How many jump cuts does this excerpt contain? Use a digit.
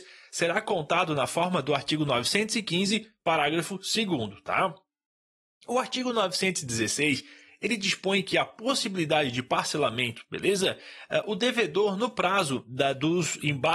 0